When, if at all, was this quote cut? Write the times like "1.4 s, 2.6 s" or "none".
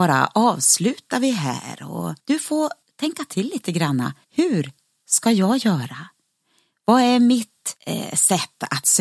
2.2 s, 2.8 s, 4.2 s, 7.8 s

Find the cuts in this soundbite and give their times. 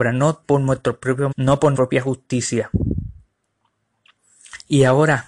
1.3 s, 1.7 s

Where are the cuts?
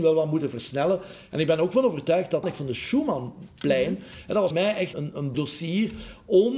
2.4 s, 4.5 s, 4.9 s, 5.3 s

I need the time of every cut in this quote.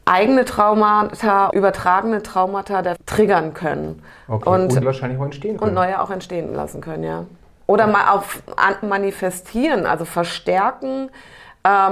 1.5 s, 3.0 s, 4.8 s, 5.6 s, 8.8 s

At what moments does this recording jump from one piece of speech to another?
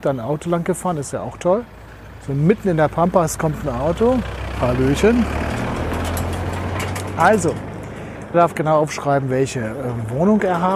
8.3 s

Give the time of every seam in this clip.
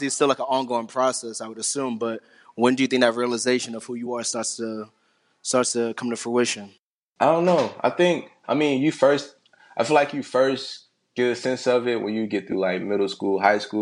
none

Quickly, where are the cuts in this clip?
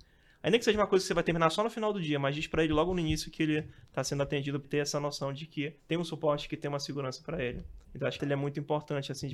4.6 s, 5.8 s, 7.8 s, 8.2 s

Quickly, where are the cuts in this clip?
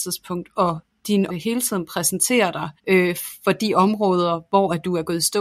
1.3 s, 2.8 s

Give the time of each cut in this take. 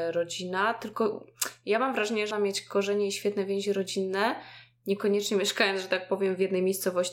2.3 s

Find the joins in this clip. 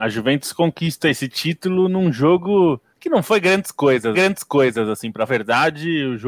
2.9 s, 4.1 s, 5.3 s

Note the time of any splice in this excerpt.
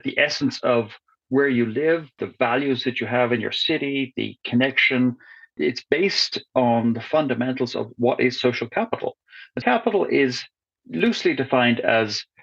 9.6 s

